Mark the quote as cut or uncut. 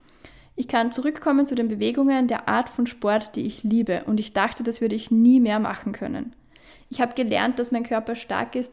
uncut